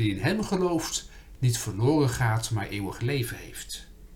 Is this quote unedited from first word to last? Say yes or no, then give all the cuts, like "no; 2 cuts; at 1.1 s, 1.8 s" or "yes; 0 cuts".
yes; 0 cuts